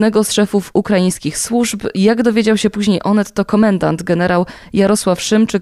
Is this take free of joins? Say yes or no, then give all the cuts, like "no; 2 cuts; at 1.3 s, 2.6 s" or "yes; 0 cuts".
yes; 0 cuts